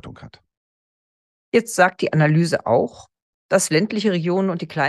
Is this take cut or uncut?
uncut